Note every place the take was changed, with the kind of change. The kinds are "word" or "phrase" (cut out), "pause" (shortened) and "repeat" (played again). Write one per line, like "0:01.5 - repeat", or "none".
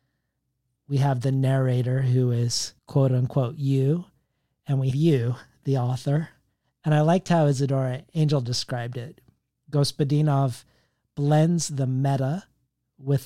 0:02.8 - pause
0:04.9 - word
0:06.6 - pause